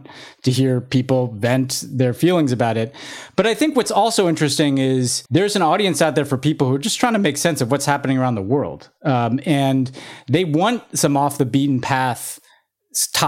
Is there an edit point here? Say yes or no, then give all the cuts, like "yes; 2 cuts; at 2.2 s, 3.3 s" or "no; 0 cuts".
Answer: yes; 1 cut; at 5.3 s